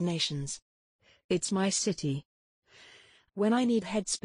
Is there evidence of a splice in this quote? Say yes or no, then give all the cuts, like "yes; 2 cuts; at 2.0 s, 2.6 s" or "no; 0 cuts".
no; 0 cuts